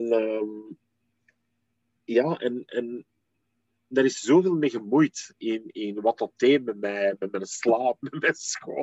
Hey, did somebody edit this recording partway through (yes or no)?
no